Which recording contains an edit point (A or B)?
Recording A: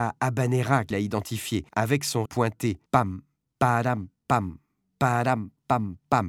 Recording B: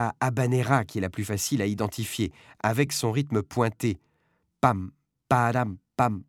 A